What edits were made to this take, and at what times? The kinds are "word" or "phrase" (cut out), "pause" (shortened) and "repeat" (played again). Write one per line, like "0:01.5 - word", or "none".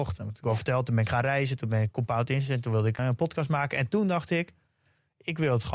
0:03.0 - word